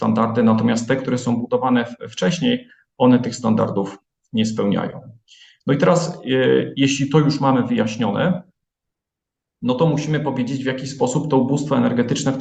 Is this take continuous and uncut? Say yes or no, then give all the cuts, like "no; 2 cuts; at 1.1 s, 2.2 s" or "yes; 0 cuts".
yes; 0 cuts